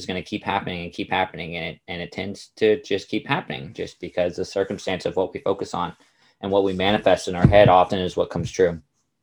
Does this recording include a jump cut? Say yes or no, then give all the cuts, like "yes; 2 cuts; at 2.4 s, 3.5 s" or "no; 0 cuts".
no; 0 cuts